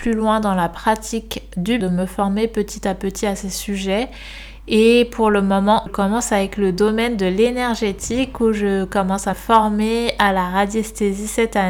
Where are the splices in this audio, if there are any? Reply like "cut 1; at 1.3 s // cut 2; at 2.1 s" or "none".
cut 1; at 1.8 s // cut 2; at 5.9 s // cut 3; at 9.3 s